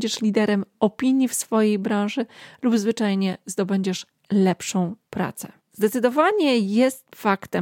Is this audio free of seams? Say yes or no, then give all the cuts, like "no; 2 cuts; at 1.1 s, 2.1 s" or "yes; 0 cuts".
no; 1 cut; at 5.6 s